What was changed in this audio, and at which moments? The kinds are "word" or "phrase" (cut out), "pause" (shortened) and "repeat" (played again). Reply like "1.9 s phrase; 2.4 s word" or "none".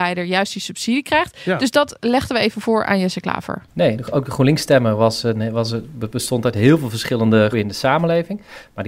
7.5 s word